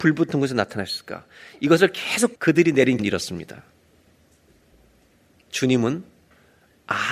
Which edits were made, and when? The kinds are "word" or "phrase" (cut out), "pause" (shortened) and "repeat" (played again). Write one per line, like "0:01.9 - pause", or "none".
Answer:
0:02.3 - word
0:03.0 - word